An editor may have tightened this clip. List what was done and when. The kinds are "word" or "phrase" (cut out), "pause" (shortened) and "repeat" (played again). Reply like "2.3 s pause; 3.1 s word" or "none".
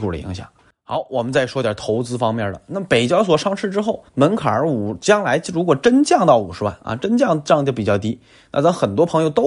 4.1 s pause